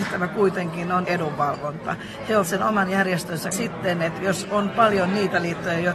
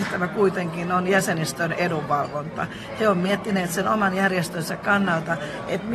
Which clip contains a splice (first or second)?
first